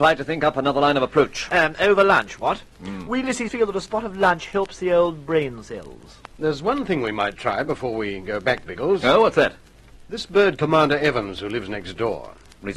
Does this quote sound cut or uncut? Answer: cut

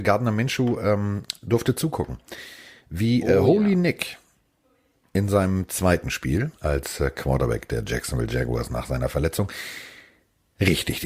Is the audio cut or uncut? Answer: uncut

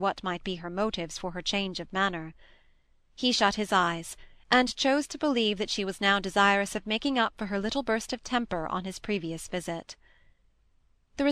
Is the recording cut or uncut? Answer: uncut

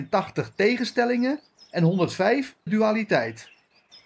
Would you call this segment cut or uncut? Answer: cut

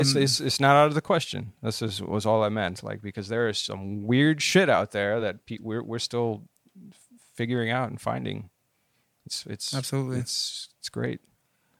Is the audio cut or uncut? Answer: uncut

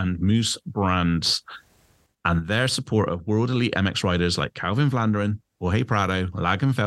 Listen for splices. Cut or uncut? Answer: uncut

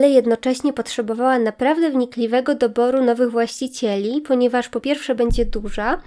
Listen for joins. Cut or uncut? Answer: uncut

